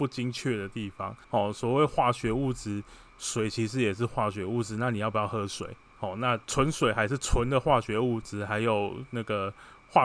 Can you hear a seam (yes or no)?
yes